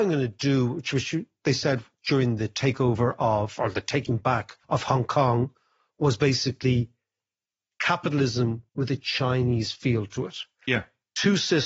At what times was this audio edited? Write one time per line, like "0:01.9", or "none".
0:04.6
0:08.7